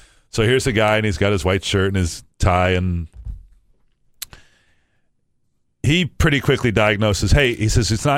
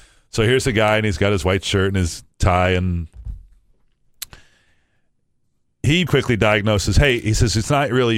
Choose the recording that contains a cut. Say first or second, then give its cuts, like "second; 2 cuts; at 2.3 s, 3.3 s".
second; 1 cut; at 6.1 s